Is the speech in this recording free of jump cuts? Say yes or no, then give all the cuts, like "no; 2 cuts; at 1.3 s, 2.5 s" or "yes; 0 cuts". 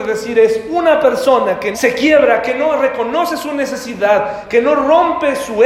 no; 1 cut; at 1.7 s